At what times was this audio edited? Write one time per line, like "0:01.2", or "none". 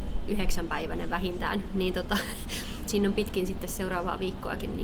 none